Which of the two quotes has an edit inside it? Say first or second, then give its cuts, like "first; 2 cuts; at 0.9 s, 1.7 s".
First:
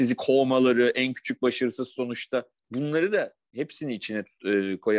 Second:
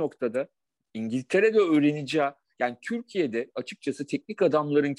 first; 1 cut; at 2.6 s